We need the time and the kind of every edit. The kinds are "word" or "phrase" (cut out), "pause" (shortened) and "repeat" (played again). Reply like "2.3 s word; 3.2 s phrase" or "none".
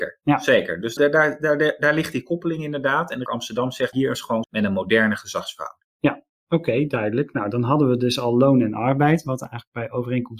1.0 s word; 3.3 s word; 3.9 s phrase; 4.4 s phrase